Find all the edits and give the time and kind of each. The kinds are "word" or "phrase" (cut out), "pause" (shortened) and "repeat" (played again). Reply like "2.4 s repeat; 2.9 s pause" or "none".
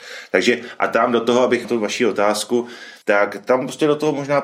1.6 s word; 3.0 s pause